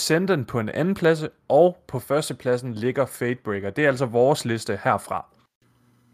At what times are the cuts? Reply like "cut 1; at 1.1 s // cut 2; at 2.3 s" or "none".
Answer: none

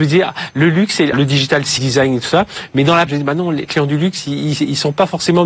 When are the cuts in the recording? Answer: cut 1; at 1.1 s // cut 2; at 1.8 s // cut 3; at 3.1 s // cut 4; at 3.6 s

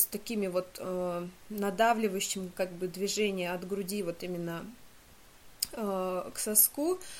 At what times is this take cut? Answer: none

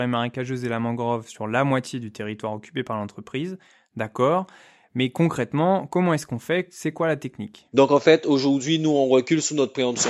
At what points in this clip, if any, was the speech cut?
none

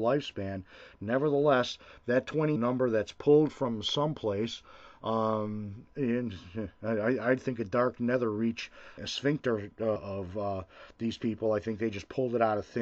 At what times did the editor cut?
cut 1; at 2.6 s // cut 2; at 9.0 s // cut 3; at 10.0 s

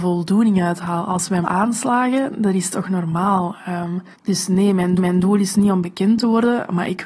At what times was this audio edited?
cut 1; at 1.4 s // cut 2; at 4.1 s // cut 3; at 5.0 s

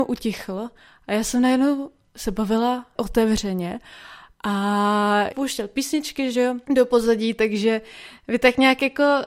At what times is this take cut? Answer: cut 1; at 3.0 s // cut 2; at 5.3 s // cut 3; at 6.6 s

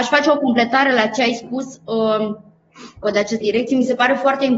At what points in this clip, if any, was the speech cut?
cut 1; at 3.0 s // cut 2; at 3.4 s

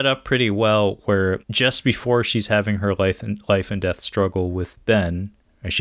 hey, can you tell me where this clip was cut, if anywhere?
cut 1; at 1.4 s

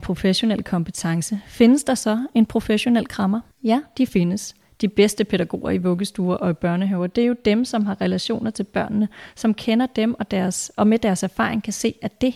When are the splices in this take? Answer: cut 1; at 3.5 s

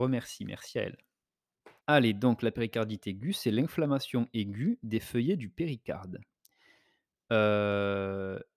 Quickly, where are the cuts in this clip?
cut 1; at 1.8 s

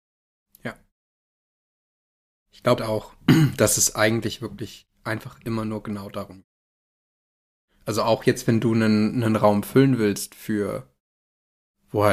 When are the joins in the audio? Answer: cut 1; at 2.8 s

